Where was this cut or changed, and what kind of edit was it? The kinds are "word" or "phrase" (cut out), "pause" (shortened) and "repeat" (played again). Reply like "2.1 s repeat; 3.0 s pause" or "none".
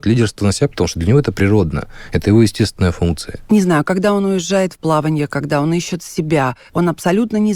none